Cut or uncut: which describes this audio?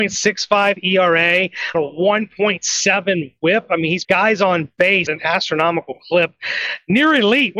cut